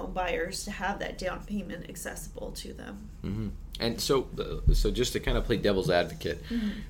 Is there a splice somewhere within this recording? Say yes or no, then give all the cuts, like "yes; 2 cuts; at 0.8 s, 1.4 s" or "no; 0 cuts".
no; 0 cuts